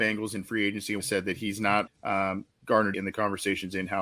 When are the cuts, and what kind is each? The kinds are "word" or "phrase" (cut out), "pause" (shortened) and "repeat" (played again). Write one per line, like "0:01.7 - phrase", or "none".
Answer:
0:01.0 - phrase
0:01.9 - word
0:02.9 - phrase